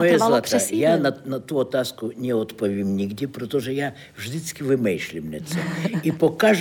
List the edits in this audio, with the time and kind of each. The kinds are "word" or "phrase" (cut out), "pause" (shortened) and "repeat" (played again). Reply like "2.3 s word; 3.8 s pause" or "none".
none